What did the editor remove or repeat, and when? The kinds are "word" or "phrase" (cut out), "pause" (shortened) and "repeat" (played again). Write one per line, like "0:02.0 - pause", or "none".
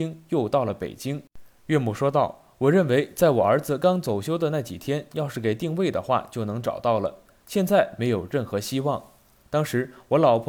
none